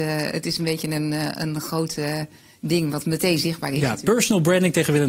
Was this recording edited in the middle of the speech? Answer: no; 0 cuts

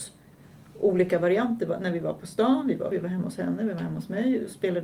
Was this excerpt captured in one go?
no; 1 cut; at 2.9 s

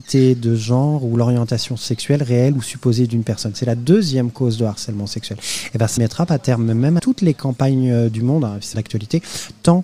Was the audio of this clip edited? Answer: yes; 3 cuts; at 6.0 s, 7.0 s, 8.7 s

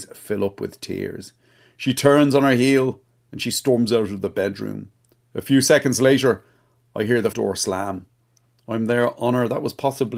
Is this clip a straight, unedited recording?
no; 1 cut; at 7.3 s

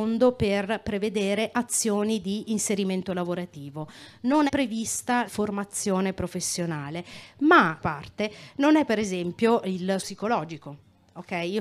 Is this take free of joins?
no; 5 cuts; at 4.5 s, 5.3 s, 7.8 s, 8.9 s, 10.0 s

